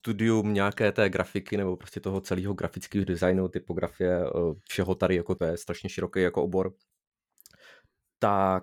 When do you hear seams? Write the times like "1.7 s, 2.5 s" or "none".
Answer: 5.4 s

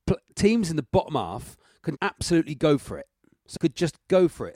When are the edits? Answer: 2.0 s, 3.6 s

